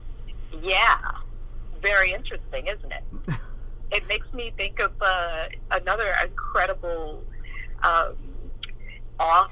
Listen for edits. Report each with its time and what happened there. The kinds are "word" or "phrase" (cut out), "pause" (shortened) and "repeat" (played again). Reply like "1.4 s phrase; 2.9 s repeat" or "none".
none